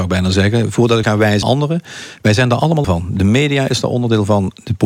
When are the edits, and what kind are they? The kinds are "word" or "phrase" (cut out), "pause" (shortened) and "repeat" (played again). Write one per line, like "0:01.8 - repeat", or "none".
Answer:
0:01.0 - word
0:01.4 - word
0:02.8 - word